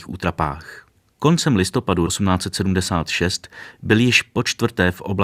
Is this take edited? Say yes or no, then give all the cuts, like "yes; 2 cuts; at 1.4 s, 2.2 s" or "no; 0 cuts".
yes; 2 cuts; at 1.0 s, 2.1 s